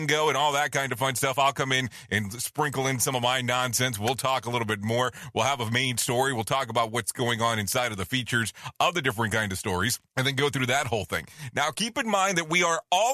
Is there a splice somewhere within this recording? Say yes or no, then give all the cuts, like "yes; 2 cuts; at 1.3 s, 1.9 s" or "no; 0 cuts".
yes; 1 cut; at 10.1 s